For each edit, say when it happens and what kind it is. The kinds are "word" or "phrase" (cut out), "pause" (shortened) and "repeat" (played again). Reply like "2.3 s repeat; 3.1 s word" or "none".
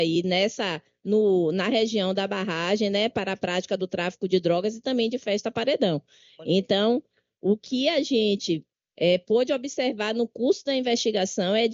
none